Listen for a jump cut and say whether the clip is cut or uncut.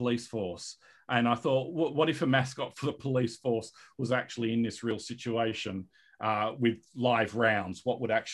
uncut